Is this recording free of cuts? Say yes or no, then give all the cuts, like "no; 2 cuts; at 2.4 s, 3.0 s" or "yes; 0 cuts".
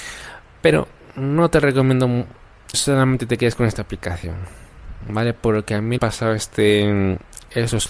no; 2 cuts; at 2.7 s, 6.0 s